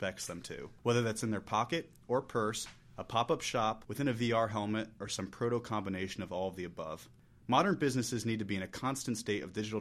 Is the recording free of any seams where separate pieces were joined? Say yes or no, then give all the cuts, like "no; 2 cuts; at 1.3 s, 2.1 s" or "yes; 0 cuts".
yes; 0 cuts